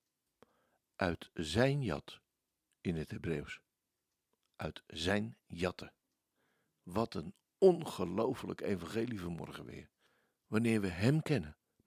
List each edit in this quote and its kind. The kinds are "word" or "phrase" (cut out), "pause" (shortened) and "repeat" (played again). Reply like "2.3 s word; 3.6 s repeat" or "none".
none